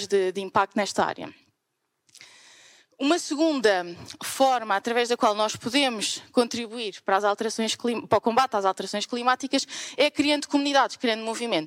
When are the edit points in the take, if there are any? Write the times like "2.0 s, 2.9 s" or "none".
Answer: none